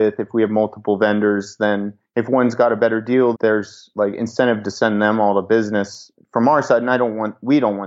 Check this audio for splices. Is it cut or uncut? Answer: cut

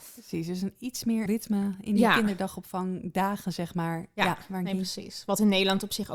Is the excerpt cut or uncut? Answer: cut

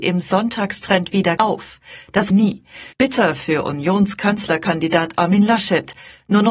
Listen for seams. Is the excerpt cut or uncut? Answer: cut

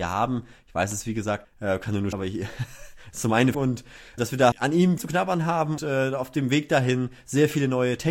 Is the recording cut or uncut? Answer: cut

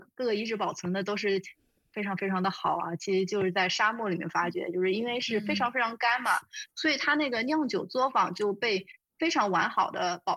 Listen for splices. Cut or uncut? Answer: uncut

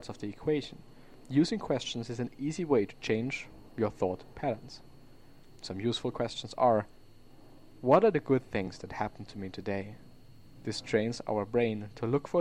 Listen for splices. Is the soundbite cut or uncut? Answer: uncut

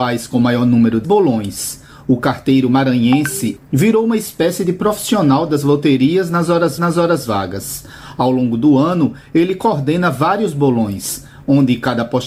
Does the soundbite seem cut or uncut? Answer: cut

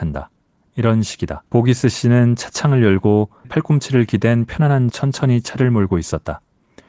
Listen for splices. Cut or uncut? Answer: cut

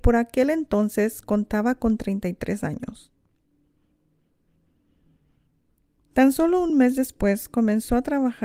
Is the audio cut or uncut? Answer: uncut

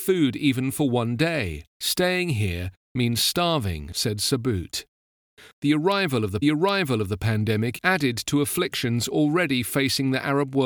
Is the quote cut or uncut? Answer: cut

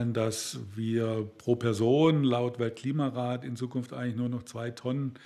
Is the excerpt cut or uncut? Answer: uncut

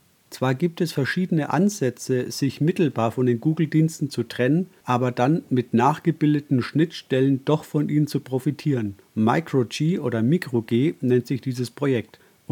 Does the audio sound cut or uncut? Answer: uncut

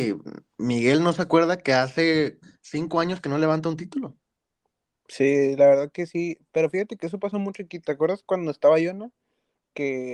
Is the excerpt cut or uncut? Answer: uncut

